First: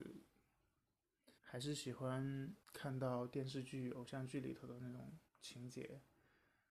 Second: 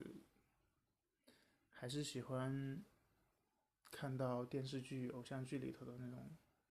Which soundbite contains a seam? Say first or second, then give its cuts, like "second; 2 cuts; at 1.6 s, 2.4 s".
first; 3 cuts; at 1.4 s, 2.6 s, 5.3 s